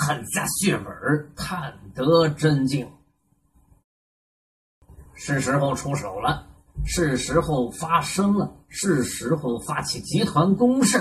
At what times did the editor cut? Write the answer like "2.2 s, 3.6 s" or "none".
5.1 s

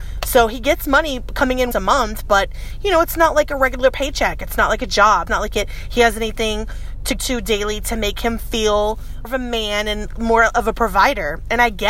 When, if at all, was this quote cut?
1.7 s, 5.3 s, 7.2 s, 9.2 s

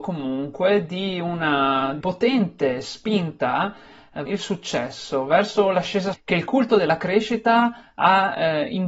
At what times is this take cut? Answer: 2.0 s, 4.3 s, 6.1 s

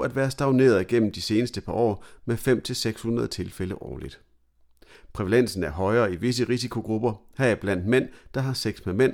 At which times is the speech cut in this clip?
none

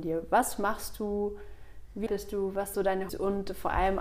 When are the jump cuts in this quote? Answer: 2.1 s, 2.7 s, 3.1 s

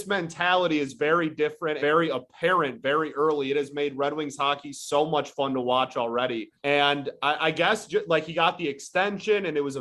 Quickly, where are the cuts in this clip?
1.8 s, 6.6 s

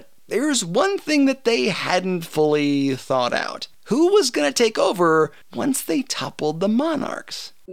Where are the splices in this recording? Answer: 3.7 s, 5.4 s

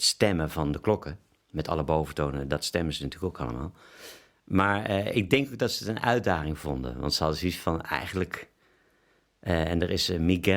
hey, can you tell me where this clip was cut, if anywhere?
none

